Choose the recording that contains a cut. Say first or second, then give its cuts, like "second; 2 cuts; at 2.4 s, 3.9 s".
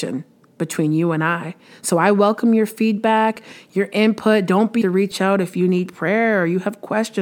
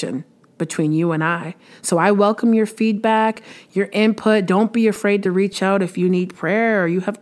first; 1 cut; at 4.8 s